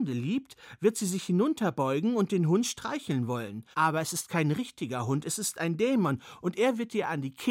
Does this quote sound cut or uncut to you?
cut